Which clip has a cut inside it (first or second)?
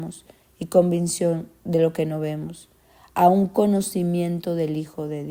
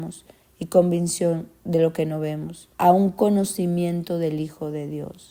second